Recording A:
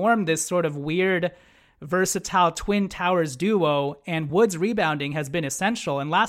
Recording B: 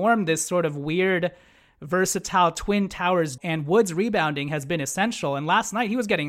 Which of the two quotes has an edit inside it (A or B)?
B